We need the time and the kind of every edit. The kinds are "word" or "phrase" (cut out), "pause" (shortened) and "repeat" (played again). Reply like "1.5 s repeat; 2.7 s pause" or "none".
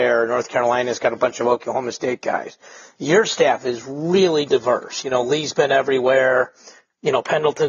none